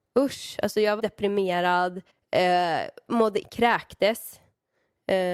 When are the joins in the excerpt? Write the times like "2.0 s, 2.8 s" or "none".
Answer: 1.0 s, 2.1 s, 3.4 s